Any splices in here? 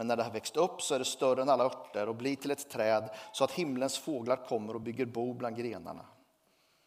no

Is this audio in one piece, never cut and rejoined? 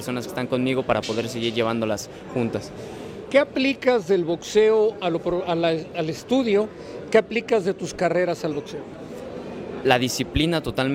yes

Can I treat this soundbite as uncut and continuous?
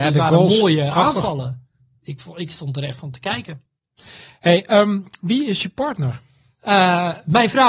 yes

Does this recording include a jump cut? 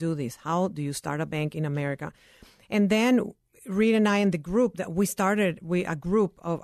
no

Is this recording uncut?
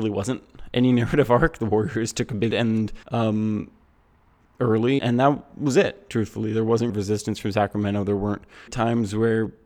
no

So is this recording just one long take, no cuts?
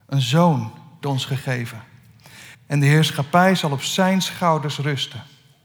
no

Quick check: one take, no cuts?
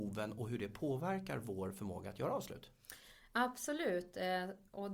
yes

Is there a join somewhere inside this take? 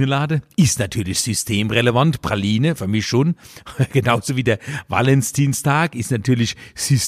no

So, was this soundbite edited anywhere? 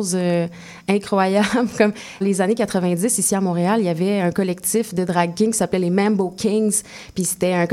yes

